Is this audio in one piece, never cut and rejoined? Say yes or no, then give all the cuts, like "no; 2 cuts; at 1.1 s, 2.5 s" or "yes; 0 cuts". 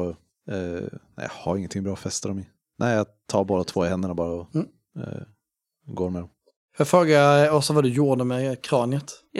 yes; 0 cuts